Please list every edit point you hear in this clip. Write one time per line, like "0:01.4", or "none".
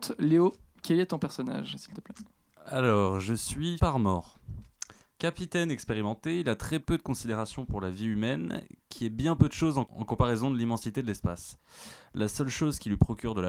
0:03.8
0:09.9

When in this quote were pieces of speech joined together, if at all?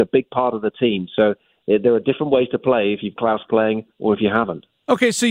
0:03.2

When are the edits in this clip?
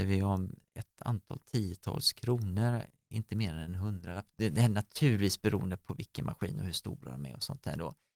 none

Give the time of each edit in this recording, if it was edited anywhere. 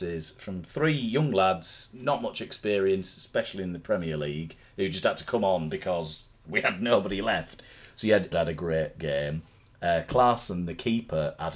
0:08.3

